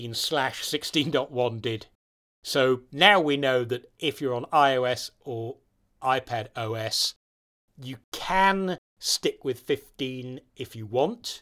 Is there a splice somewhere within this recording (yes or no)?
no